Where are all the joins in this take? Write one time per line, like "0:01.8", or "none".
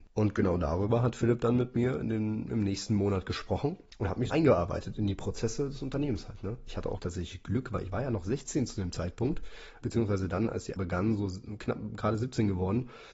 0:04.3
0:07.0
0:09.8
0:10.8